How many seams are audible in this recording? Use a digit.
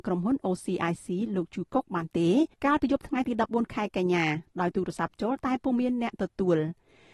1